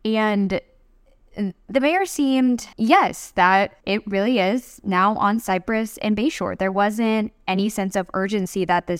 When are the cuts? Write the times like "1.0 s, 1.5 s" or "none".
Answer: 2.7 s, 3.8 s